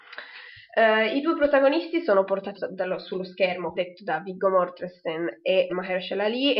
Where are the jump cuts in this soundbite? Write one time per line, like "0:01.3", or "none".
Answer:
0:02.5
0:03.7
0:05.7